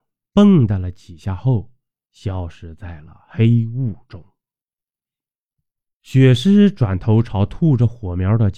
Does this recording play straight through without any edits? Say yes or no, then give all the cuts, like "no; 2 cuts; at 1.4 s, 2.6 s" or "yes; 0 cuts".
yes; 0 cuts